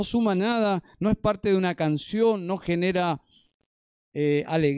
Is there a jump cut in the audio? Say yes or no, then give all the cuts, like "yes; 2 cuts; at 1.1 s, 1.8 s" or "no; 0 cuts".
no; 0 cuts